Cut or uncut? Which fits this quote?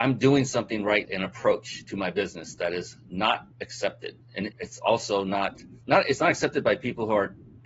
cut